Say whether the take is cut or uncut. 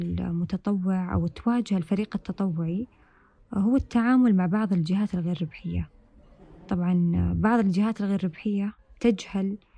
uncut